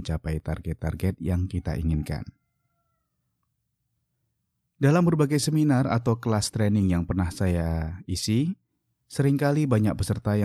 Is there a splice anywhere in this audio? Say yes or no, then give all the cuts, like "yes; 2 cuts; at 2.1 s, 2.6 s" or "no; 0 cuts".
no; 0 cuts